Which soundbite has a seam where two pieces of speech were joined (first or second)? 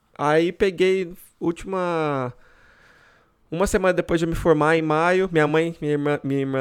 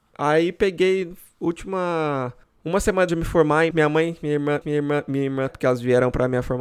second